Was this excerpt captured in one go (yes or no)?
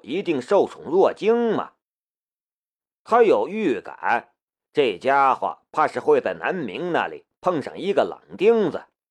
yes